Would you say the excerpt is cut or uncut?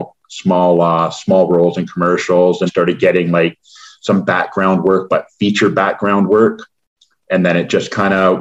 cut